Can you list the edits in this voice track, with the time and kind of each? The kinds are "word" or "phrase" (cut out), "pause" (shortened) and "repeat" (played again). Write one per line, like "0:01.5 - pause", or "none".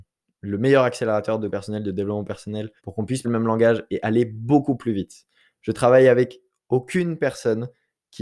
0:01.5 - word
0:02.8 - pause
0:03.2 - word